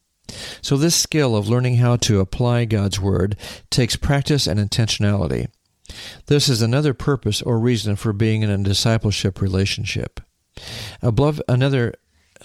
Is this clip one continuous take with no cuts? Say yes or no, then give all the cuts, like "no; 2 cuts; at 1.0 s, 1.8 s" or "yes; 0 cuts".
yes; 0 cuts